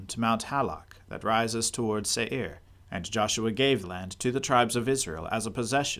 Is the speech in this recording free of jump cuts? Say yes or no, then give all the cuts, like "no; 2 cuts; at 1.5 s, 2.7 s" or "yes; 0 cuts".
no; 2 cuts; at 2.8 s, 3.8 s